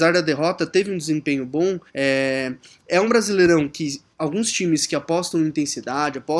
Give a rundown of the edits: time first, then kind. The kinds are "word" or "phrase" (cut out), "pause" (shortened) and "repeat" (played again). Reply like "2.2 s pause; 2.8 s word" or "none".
1.9 s pause; 4.1 s pause